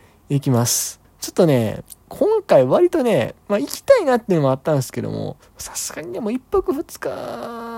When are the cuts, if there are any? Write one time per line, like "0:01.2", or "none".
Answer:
0:01.0
0:02.0
0:03.4
0:05.4

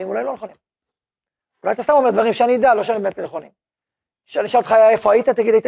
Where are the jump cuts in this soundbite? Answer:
none

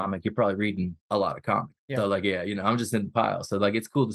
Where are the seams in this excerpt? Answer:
0:01.0
0:01.8

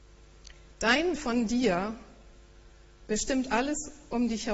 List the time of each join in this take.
0:01.1

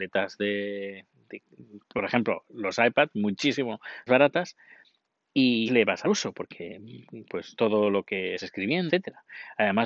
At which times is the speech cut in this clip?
0:01.8
0:04.1
0:05.7
0:06.0
0:07.2
0:07.6
0:08.4
0:08.9

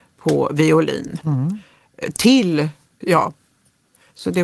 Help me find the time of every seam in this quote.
0:03.0

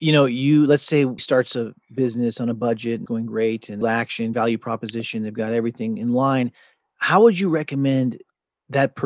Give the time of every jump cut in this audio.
0:01.2
0:03.1
0:03.8
0:04.3

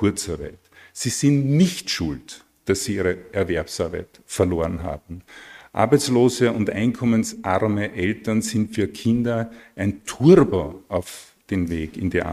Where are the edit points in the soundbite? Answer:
0:11.4

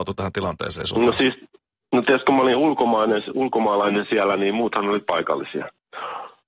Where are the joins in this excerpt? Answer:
none

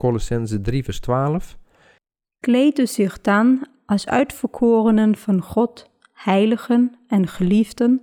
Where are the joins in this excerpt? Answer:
none

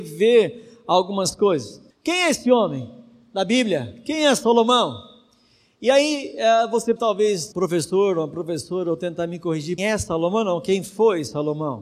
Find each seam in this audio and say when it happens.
0:01.9
0:07.0
0:07.5
0:09.8

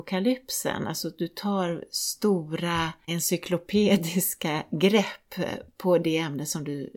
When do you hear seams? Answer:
0:03.1

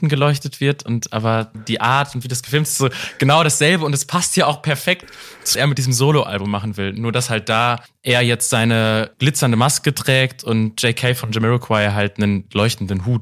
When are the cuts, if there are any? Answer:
0:01.5
0:05.5
0:07.9
0:09.1

